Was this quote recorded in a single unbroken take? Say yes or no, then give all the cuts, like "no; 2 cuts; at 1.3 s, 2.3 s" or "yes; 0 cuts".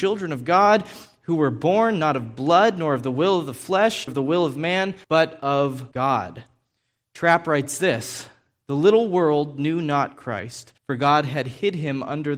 no; 4 cuts; at 4.1 s, 5.0 s, 5.9 s, 10.8 s